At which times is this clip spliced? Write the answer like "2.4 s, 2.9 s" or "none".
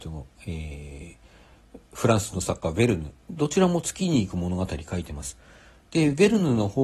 3.2 s